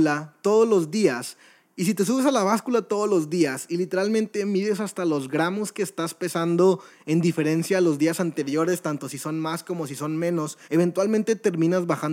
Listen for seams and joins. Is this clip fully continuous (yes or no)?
no